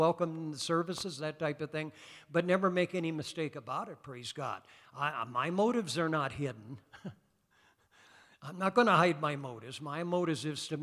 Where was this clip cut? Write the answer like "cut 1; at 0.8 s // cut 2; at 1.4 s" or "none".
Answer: none